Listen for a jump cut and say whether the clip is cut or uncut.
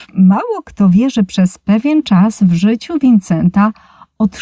uncut